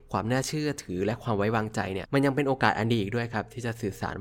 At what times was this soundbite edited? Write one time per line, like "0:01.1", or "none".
none